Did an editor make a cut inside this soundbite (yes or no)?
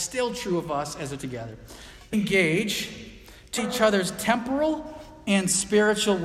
yes